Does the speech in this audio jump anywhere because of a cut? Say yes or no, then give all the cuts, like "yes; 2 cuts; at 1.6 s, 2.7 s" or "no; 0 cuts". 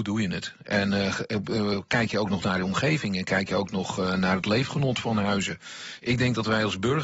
no; 0 cuts